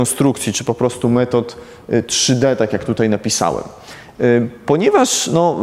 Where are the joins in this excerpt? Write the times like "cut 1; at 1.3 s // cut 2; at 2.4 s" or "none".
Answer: none